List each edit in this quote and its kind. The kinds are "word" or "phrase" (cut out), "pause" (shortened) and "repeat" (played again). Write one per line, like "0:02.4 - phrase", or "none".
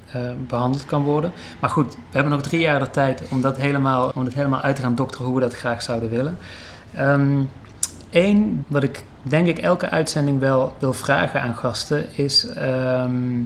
0:04.1 - word
0:08.6 - phrase